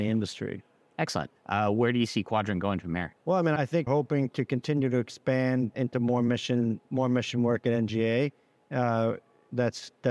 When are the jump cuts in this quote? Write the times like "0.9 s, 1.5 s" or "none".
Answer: 1.4 s, 3.2 s, 3.6 s, 3.9 s, 5.7 s, 6.9 s